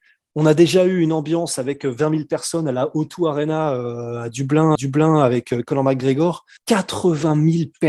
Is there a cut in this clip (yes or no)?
yes